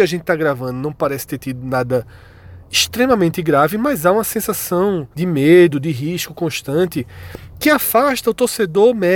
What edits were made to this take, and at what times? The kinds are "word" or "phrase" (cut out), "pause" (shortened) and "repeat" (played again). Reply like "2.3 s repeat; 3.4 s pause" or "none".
5.1 s pause